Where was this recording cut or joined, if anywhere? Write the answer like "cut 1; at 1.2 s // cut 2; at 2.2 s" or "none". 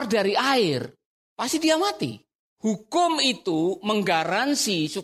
none